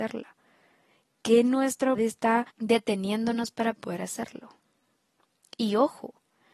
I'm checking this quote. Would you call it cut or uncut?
cut